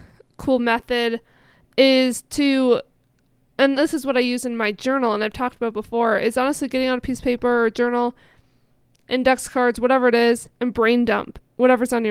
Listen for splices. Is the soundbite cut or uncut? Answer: uncut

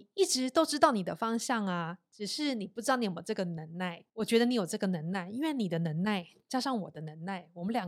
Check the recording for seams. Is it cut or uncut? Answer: cut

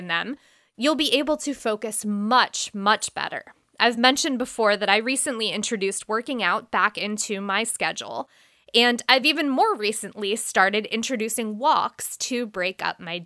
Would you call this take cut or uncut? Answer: uncut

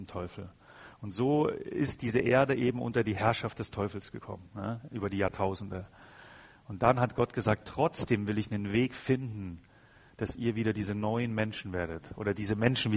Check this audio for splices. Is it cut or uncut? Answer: uncut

